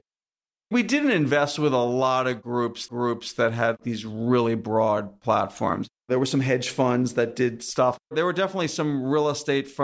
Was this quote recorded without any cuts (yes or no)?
no